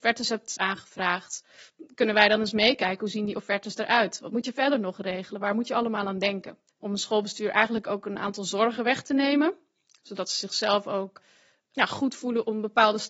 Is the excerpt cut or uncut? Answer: cut